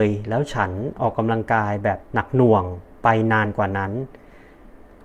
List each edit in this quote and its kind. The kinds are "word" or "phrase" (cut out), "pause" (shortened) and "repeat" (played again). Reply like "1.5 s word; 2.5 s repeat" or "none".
2.0 s pause